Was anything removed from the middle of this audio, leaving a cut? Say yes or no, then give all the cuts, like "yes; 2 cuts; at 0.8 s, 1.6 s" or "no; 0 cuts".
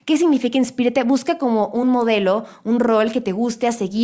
no; 0 cuts